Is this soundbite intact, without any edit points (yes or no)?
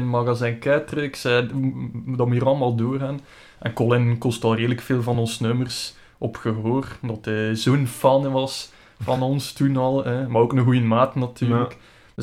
yes